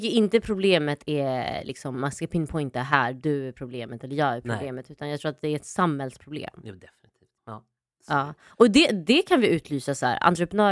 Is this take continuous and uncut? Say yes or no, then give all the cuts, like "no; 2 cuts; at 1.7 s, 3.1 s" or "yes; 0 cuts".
no; 1 cut; at 7.4 s